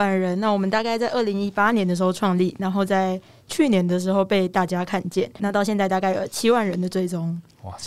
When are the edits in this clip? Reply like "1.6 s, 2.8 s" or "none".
5.4 s